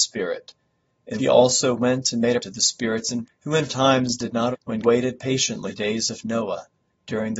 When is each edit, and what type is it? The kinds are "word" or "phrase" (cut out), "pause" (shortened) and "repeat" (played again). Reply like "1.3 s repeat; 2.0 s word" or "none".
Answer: 1.2 s word; 2.4 s word; 3.2 s word; 3.7 s word; 4.5 s word; 4.8 s word; 5.7 s word